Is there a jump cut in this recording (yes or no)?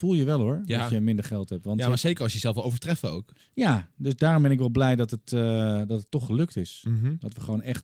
yes